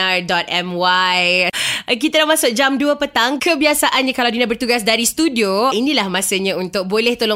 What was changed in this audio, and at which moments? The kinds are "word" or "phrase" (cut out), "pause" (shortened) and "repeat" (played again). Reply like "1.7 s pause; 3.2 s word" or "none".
5.7 s word